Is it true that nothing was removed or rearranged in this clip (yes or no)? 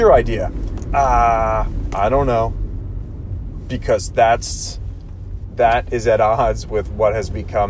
yes